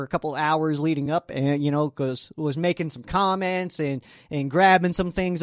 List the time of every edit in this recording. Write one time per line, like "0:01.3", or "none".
none